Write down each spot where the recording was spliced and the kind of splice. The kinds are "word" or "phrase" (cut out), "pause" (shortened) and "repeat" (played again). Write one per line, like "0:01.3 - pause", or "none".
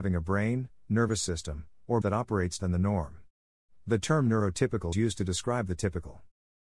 0:02.0 - word
0:02.6 - word
0:04.9 - word

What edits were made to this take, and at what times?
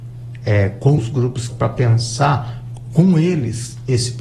0:01.0 - phrase
0:01.5 - word

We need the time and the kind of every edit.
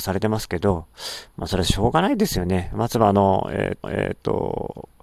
0:03.8 - repeat

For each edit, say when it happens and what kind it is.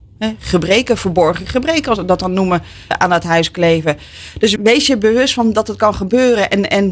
0:02.0 - word
0:02.9 - word
0:04.6 - word

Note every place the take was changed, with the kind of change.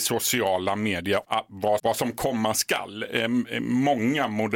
0:01.2 - word
0:01.8 - word

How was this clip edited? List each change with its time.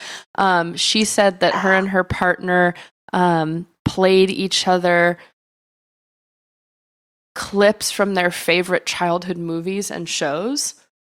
none

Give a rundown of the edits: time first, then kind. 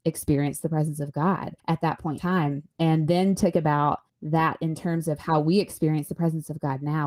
0:01.6 - pause
0:02.2 - word
0:03.5 - phrase
0:04.1 - pause

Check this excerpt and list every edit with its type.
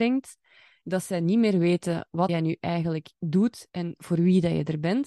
0:02.3 - word

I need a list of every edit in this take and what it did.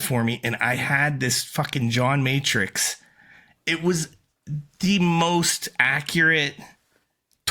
none

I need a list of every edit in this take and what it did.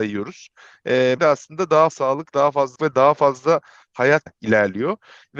0:01.2 - word
0:01.9 - word
0:02.8 - word
0:04.3 - word

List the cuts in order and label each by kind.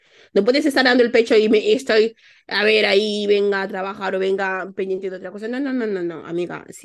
none

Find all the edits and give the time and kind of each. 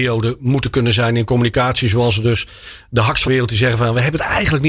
0:03.3 - word

